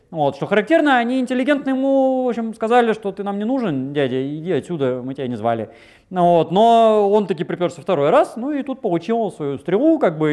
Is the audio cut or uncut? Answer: uncut